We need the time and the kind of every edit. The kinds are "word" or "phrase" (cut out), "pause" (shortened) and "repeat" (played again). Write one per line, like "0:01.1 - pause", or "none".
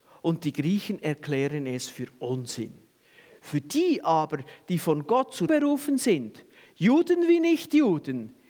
0:05.5 - word